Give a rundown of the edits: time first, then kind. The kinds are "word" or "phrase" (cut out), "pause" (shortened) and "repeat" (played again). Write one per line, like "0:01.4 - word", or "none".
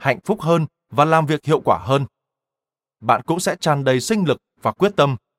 none